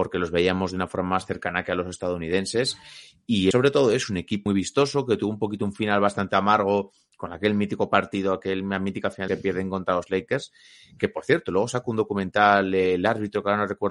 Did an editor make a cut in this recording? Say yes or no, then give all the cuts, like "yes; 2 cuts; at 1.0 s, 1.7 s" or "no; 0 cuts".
yes; 3 cuts; at 3.5 s, 4.5 s, 9.3 s